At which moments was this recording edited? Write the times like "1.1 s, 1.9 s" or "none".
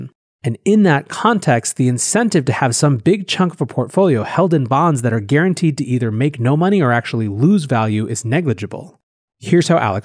none